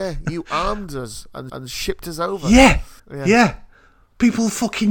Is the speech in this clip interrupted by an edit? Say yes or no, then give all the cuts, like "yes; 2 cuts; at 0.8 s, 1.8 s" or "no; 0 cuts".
yes; 2 cuts; at 1.5 s, 3.0 s